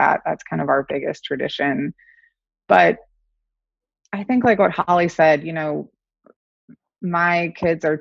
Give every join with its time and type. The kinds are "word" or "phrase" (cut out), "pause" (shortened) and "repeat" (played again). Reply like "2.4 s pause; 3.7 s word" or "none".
none

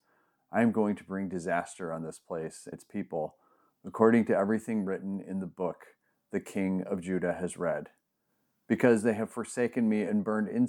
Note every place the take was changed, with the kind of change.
2.7 s word

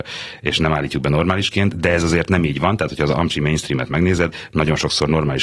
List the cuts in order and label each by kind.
none

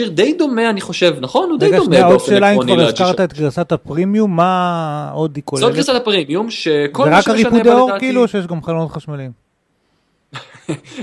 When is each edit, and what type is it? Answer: none

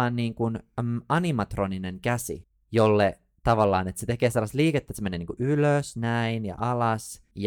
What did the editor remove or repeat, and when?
none

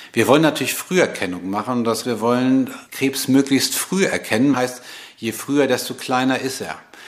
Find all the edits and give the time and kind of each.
2.0 s word; 2.9 s pause; 4.5 s phrase

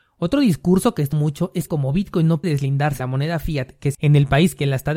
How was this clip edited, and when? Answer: 1.1 s word; 1.7 s word; 2.4 s word; 3.0 s word; 3.9 s word

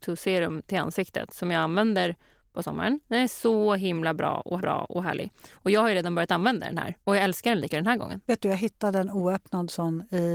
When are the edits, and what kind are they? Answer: 4.6 s repeat; 7.0 s pause; 7.7 s word

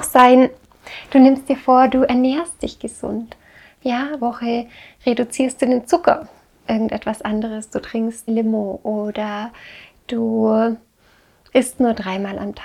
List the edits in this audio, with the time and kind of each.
4.2 s word; 6.6 s word; 8.3 s word

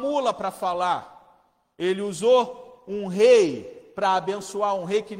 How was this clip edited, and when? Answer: none

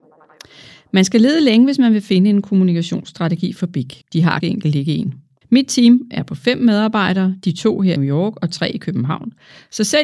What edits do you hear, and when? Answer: 4.0 s pause; 4.4 s word; 5.4 s pause; 8.0 s phrase

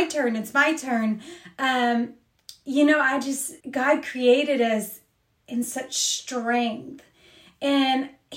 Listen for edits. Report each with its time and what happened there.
3.6 s pause

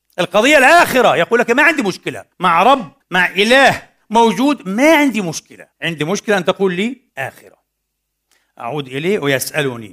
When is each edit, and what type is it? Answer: 2.3 s pause; 3.0 s pause; 5.7 s pause; 7.1 s pause

